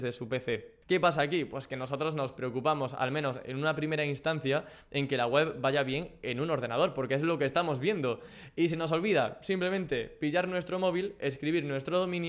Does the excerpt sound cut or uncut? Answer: uncut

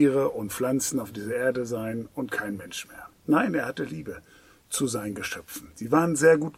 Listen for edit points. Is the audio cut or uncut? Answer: uncut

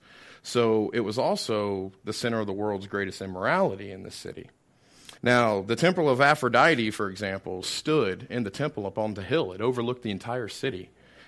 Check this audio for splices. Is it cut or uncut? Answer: cut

